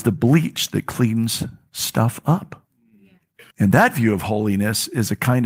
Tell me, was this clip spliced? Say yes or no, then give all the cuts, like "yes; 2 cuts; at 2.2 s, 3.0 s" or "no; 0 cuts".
yes; 1 cut; at 3.5 s